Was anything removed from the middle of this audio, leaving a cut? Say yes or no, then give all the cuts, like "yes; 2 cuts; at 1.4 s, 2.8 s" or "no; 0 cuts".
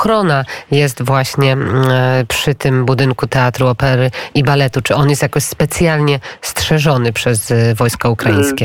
no; 0 cuts